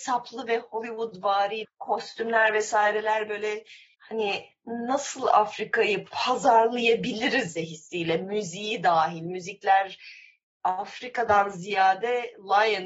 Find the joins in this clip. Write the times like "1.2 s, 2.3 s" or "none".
1.6 s, 7.6 s